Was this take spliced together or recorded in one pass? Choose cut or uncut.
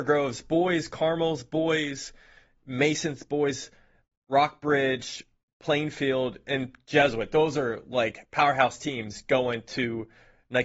uncut